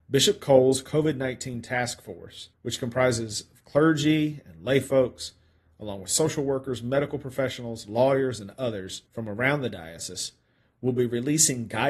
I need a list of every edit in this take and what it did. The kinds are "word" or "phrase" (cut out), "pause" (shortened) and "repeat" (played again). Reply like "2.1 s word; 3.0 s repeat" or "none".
2.5 s pause; 9.1 s pause